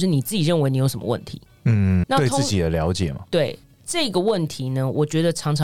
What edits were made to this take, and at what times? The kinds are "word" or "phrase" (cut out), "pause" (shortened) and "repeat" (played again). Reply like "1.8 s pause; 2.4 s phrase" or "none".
2.0 s word